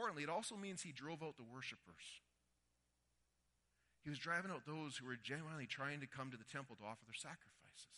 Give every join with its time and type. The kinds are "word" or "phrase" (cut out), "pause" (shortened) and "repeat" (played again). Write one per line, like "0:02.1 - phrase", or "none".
none